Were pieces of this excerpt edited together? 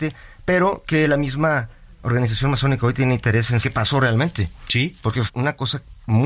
yes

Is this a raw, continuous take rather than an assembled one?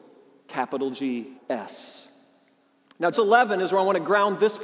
no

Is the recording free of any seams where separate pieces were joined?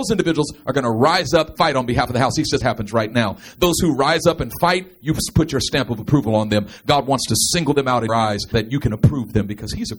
no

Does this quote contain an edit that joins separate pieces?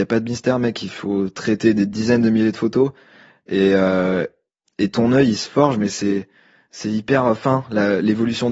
no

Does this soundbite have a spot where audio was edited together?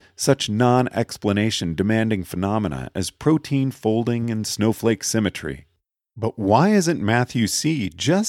no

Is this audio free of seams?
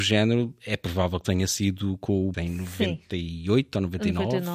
no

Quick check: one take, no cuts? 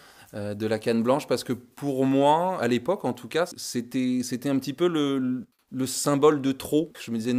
no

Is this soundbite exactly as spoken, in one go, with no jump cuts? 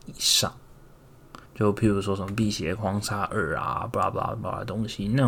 no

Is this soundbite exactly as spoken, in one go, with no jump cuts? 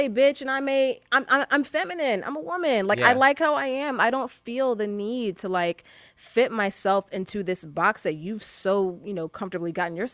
yes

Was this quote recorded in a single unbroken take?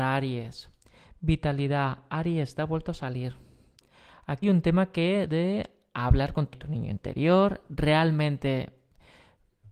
no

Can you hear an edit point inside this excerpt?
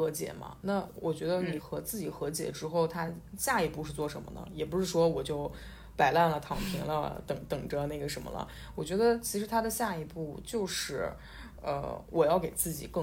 no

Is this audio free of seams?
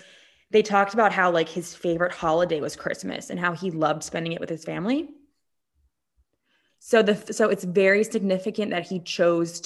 yes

